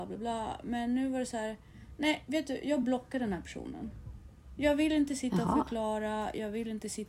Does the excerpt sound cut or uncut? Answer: uncut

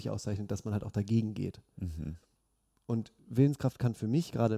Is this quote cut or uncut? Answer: uncut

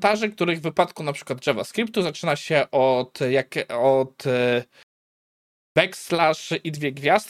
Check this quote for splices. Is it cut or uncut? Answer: uncut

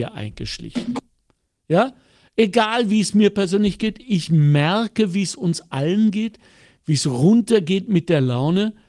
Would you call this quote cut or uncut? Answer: uncut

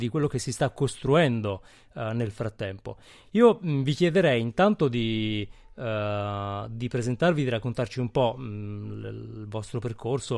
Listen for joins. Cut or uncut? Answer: uncut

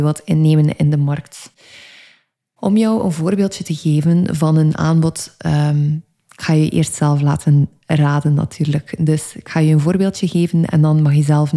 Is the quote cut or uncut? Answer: uncut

